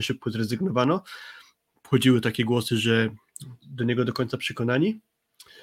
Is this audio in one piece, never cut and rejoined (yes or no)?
no